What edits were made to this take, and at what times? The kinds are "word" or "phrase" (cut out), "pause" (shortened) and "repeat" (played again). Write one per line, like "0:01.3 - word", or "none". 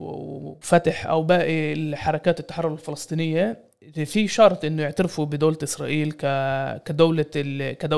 none